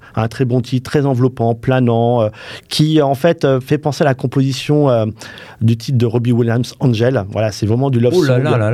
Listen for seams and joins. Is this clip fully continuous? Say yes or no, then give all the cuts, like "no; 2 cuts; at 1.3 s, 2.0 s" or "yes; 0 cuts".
yes; 0 cuts